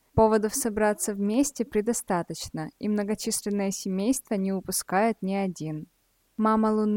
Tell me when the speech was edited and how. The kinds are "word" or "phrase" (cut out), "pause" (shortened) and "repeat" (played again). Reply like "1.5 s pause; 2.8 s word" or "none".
none